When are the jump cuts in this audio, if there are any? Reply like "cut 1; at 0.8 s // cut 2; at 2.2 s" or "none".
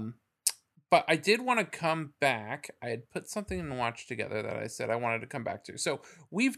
none